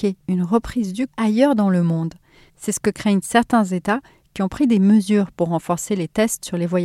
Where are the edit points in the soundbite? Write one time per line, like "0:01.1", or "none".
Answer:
0:01.1